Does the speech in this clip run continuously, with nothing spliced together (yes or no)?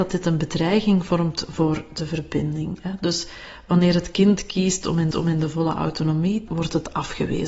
no